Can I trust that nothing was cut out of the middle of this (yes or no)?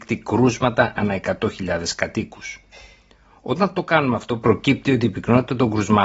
yes